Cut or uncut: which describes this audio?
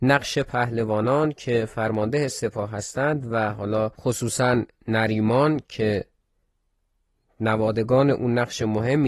uncut